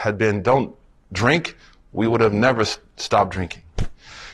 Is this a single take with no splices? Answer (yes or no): yes